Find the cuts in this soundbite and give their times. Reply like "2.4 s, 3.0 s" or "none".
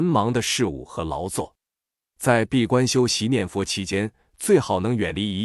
none